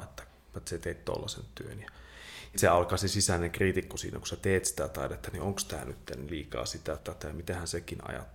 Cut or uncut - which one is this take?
cut